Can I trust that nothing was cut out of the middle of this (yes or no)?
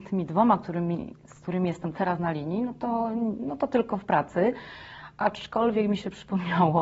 yes